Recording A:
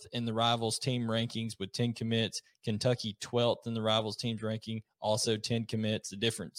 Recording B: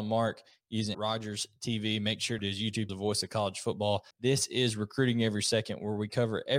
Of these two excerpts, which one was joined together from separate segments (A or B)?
B